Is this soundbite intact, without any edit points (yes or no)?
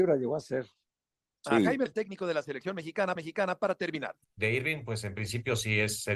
no